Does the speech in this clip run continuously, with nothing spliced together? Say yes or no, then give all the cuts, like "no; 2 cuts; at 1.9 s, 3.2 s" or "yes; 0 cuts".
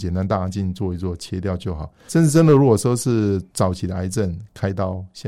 no; 2 cuts; at 2.1 s, 3.5 s